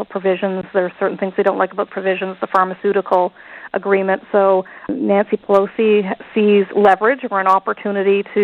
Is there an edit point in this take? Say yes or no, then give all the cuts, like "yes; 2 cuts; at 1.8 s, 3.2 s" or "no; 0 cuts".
yes; 2 cuts; at 1.9 s, 4.9 s